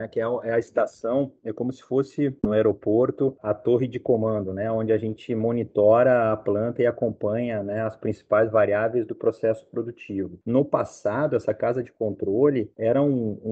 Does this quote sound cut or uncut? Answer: uncut